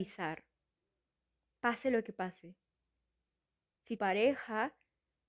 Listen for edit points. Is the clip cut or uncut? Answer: cut